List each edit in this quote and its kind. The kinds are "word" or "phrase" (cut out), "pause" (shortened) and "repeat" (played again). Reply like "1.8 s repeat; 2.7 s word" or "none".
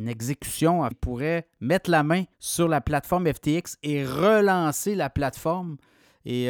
0.9 s word; 2.3 s pause